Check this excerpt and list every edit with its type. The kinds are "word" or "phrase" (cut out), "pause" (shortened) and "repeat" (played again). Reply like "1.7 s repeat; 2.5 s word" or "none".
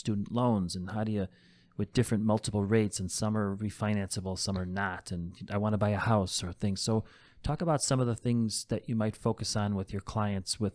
none

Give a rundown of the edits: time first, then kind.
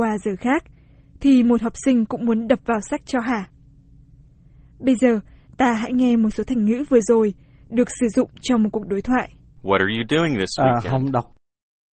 none

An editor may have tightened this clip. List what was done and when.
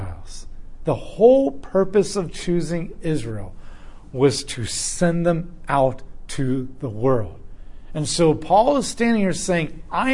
none

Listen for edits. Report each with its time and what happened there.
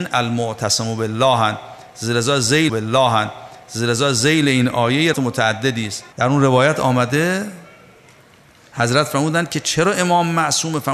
2.7 s repeat; 5.1 s phrase; 6.1 s pause

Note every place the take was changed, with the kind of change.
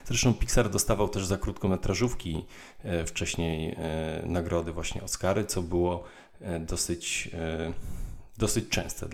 none

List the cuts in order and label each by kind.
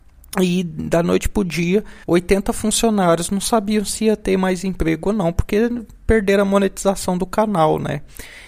2.0 s pause

